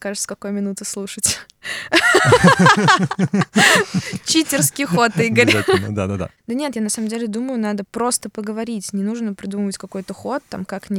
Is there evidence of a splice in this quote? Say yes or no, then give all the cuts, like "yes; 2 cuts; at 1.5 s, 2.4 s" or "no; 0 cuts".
no; 0 cuts